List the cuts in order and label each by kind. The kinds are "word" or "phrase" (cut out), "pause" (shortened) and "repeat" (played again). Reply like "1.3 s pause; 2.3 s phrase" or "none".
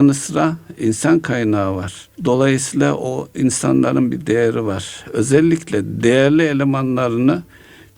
2.1 s pause